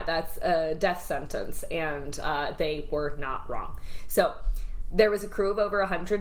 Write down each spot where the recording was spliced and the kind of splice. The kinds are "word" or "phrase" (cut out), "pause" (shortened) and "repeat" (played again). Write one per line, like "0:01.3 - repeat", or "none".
none

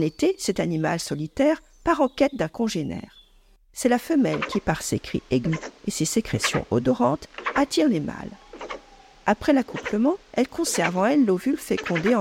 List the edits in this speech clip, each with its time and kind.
0:10.2 - pause

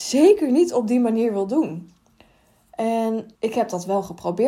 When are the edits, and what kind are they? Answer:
0:03.4 - pause

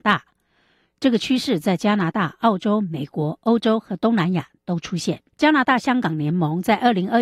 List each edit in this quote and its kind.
0:05.3 - pause

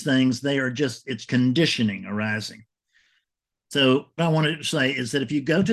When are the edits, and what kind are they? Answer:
0:01.3 - word
0:04.2 - word

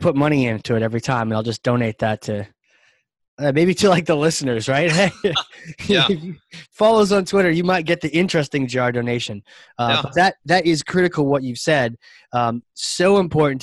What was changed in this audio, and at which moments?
none

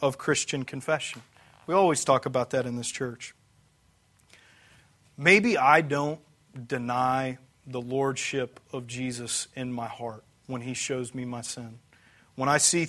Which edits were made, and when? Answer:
none

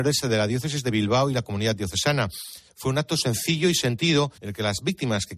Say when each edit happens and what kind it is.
0:04.4 - pause

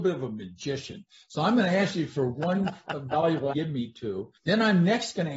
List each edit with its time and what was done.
0:03.5 - phrase
0:04.4 - pause

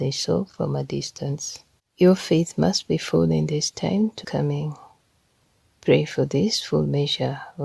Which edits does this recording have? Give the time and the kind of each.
0:01.8 - pause
0:04.2 - phrase

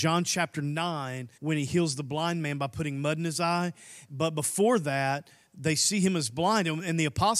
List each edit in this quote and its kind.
0:01.4 - pause

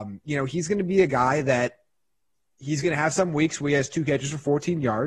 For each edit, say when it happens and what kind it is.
none

